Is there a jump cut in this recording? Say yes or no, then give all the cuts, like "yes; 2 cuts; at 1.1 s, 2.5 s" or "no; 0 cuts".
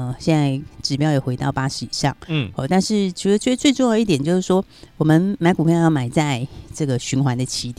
no; 0 cuts